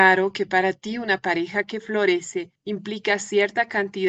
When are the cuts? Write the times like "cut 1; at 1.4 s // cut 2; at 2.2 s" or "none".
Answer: cut 1; at 2.6 s

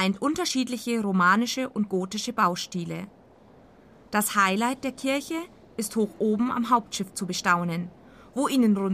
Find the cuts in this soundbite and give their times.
none

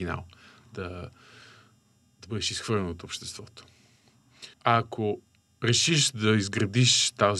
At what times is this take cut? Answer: cut 1; at 4.5 s

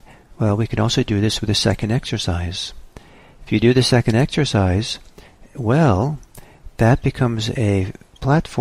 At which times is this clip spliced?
none

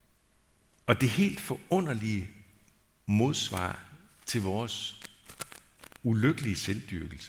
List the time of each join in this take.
none

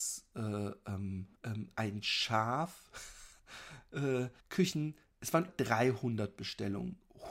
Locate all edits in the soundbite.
cut 1; at 1.4 s // cut 2; at 3.4 s // cut 3; at 4.4 s // cut 4; at 5.5 s

